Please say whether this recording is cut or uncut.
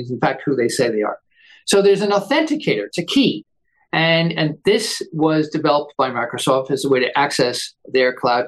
uncut